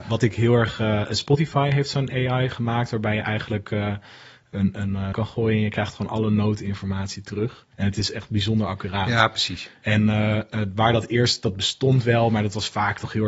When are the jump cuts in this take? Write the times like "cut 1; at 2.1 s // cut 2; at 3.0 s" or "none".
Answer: cut 1; at 4.7 s // cut 2; at 5.1 s // cut 3; at 7.7 s